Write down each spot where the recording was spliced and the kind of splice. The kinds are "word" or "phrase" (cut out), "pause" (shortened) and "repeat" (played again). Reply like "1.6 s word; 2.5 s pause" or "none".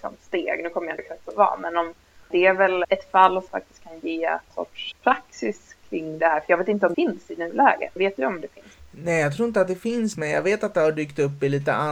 1.0 s word; 1.3 s word; 2.8 s word; 3.5 s word; 4.5 s word; 4.9 s word; 6.9 s word; 8.0 s word; 10.1 s word